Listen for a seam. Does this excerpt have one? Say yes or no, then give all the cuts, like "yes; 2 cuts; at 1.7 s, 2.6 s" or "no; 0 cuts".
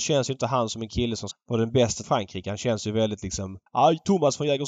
yes; 3 cuts; at 1.3 s, 2.0 s, 3.7 s